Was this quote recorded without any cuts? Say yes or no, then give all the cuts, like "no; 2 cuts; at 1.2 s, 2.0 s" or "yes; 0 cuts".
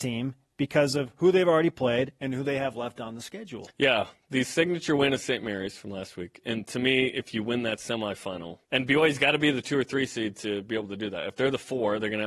no; 2 cuts; at 3.7 s, 8.6 s